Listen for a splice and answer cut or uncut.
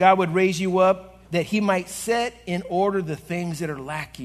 cut